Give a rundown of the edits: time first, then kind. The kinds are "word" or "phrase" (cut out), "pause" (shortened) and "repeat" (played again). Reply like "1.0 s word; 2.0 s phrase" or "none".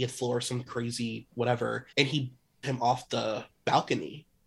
1.9 s pause; 2.6 s word